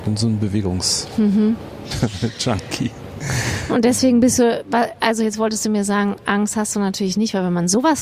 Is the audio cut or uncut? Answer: uncut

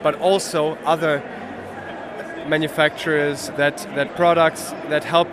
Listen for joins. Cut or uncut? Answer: cut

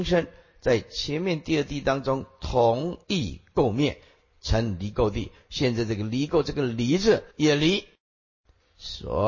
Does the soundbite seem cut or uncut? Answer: cut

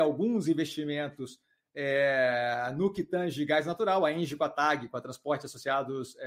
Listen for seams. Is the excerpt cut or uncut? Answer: uncut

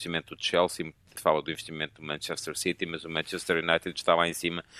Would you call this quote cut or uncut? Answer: cut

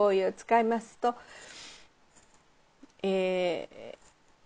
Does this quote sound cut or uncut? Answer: uncut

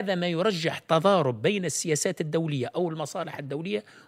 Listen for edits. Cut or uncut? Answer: uncut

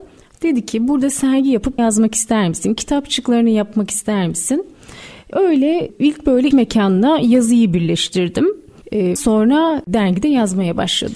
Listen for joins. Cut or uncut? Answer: cut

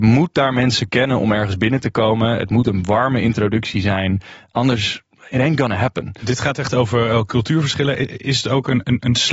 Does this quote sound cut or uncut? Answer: uncut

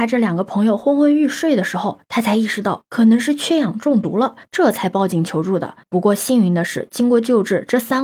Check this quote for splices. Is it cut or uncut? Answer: uncut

